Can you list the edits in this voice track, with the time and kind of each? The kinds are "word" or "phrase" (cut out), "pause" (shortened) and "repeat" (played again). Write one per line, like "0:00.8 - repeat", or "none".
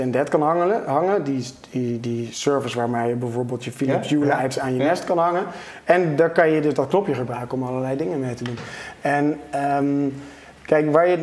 none